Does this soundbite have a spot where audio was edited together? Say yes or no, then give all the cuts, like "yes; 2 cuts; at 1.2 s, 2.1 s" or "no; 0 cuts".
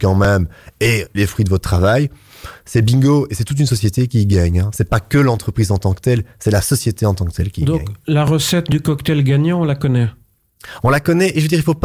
yes; 1 cut; at 1.1 s